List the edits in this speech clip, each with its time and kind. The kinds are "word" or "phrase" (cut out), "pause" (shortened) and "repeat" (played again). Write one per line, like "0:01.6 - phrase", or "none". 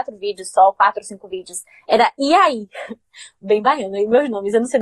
none